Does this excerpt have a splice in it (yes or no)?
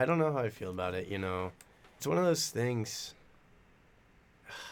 yes